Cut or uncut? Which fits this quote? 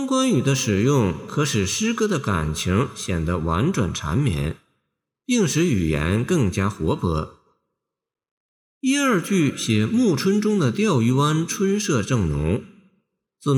uncut